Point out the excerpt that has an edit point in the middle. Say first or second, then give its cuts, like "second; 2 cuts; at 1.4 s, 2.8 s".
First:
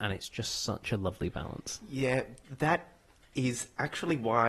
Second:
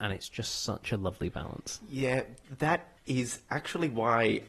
second; 1 cut; at 3.0 s